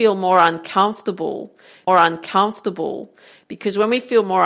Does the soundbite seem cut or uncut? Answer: cut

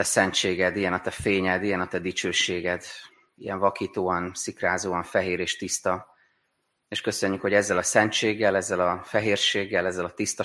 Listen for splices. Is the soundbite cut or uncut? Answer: uncut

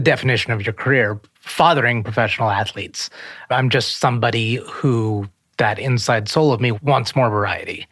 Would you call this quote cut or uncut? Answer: uncut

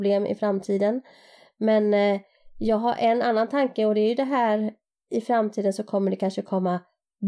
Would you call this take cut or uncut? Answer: uncut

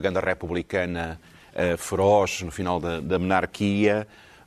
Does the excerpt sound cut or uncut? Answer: uncut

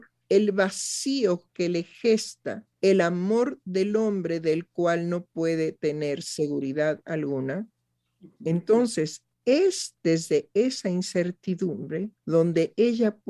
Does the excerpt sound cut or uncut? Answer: cut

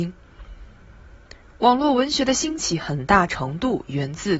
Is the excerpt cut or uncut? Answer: uncut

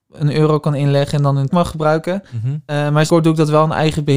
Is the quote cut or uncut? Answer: cut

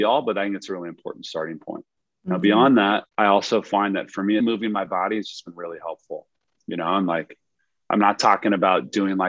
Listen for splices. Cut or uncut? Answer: cut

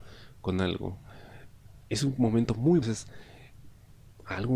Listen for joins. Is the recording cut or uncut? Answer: cut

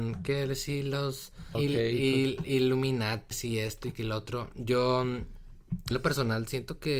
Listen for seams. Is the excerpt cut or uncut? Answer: cut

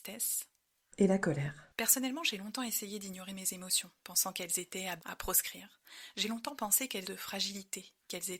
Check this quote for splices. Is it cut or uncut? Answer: cut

